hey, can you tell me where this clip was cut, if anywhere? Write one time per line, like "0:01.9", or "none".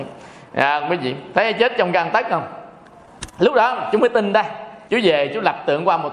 0:04.9